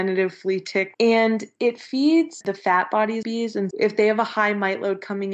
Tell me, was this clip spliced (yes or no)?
yes